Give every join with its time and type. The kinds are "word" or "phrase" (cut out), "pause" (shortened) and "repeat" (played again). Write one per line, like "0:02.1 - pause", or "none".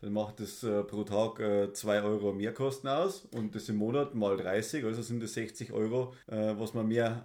0:06.2 - pause